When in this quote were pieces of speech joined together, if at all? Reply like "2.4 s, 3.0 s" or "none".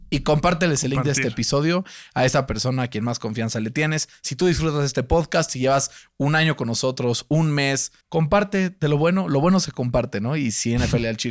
8.0 s